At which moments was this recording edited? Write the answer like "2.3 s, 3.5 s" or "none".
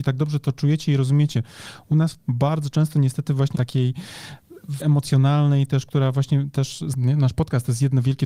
2.2 s, 3.5 s, 4.8 s, 6.9 s

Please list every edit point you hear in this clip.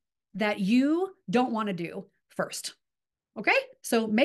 none

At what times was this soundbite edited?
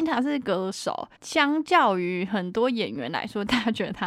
1.2 s

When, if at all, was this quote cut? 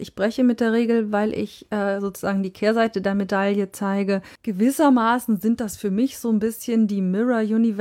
4.4 s

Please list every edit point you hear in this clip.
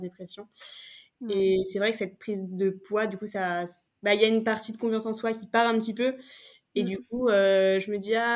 3.9 s

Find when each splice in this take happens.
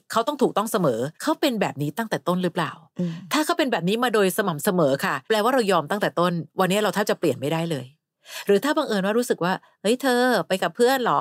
1.1 s, 5.2 s

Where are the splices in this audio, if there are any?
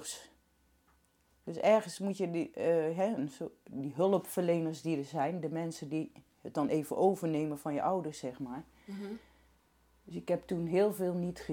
none

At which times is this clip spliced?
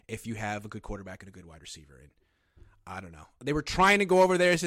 none

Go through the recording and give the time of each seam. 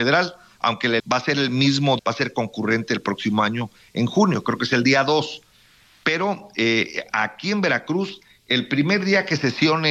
1.0 s, 2.0 s

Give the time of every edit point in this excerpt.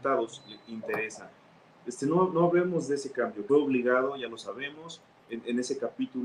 3.5 s

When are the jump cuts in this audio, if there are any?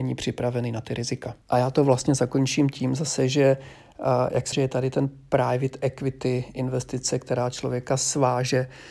1.4 s, 4.5 s

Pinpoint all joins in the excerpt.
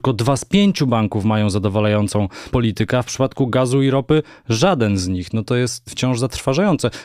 none

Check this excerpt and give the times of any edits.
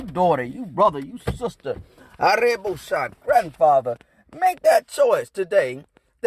none

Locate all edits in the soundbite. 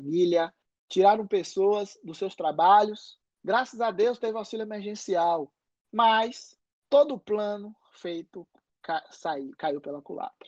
none

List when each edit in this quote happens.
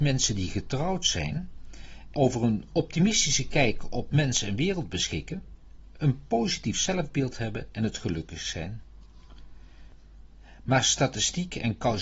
2.1 s

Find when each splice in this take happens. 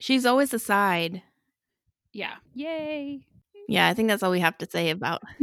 2.4 s

